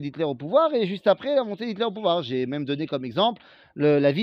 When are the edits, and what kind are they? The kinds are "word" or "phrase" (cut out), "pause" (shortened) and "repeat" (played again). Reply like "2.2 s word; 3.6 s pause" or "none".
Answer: none